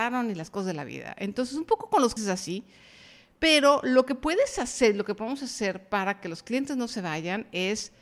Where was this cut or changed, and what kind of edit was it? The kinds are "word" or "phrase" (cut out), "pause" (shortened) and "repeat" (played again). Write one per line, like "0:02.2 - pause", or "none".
0:02.2 - word